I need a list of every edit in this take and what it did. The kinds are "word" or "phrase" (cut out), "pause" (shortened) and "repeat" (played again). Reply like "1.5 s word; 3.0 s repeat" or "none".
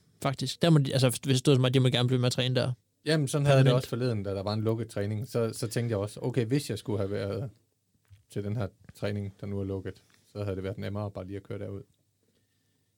none